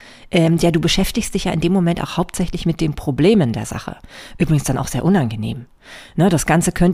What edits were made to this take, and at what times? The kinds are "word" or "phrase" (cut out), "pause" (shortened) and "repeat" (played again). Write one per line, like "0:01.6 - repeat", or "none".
none

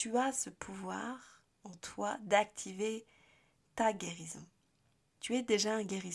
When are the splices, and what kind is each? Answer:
none

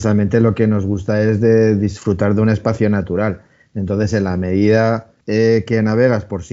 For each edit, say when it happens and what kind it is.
0:05.2 - pause

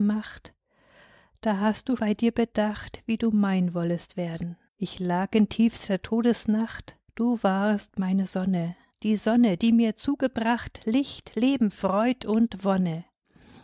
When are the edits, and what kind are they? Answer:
0:02.0 - word
0:04.7 - pause
0:07.1 - pause
0:08.9 - pause

